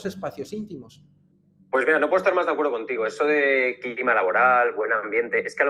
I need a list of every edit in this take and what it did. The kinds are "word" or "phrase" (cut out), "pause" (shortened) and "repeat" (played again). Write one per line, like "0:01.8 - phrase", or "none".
0:01.3 - pause

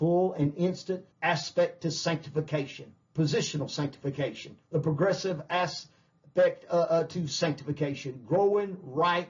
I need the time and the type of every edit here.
0:01.1 - pause
0:03.0 - pause
0:04.6 - pause

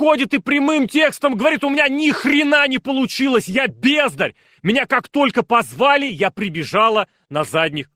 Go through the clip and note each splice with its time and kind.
none

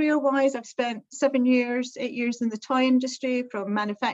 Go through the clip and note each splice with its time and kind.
none

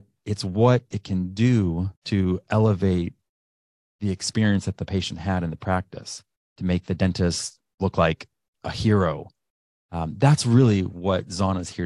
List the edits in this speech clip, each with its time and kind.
0:02.0 - pause

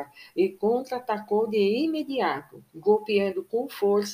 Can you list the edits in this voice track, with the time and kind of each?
0:02.7 - pause

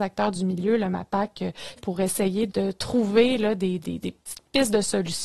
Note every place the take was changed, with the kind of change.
0:01.8 - phrase
0:02.5 - word
0:03.8 - word

